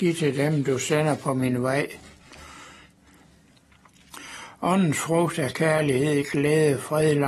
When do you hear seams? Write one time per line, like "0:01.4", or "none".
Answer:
none

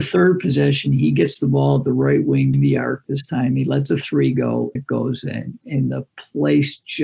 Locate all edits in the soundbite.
0:02.5
0:04.7

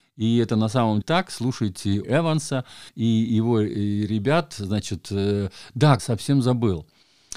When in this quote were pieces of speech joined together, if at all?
0:01.0
0:02.0
0:02.9
0:06.0

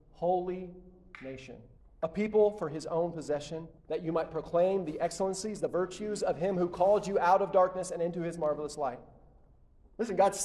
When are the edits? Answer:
0:01.8
0:03.8

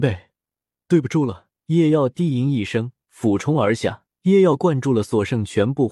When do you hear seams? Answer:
0:01.6
0:03.0
0:04.1

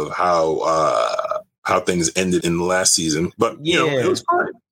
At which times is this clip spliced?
0:02.4

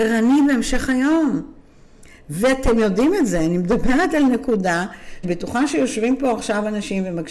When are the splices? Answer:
0:05.2

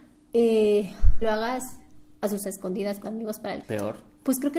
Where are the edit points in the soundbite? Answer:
0:01.2
0:02.4
0:03.0
0:03.6

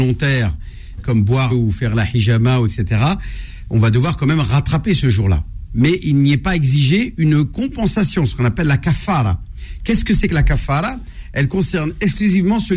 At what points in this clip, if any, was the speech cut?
0:01.0
0:01.5

